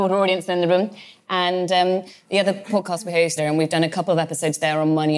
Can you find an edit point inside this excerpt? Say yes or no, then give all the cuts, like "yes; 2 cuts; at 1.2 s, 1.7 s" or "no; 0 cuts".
yes; 1 cut; at 3.4 s